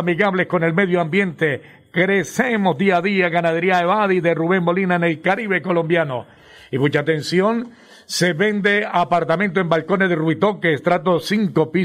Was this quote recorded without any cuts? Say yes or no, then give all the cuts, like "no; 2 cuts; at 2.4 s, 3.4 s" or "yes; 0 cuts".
yes; 0 cuts